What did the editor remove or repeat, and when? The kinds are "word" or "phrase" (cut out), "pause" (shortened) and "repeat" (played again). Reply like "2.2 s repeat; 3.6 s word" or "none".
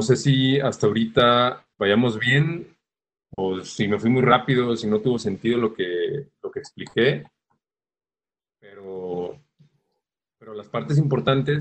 1.7 s pause